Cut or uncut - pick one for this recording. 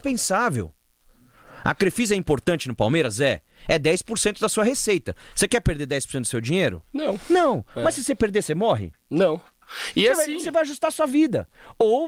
uncut